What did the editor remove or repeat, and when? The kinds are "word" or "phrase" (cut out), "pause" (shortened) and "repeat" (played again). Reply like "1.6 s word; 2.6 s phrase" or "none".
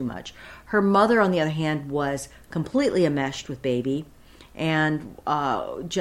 none